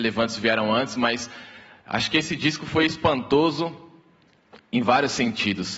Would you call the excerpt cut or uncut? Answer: uncut